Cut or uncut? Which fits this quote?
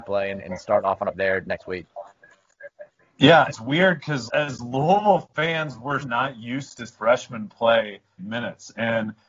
cut